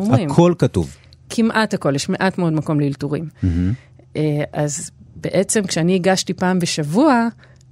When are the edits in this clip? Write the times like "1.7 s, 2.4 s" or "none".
none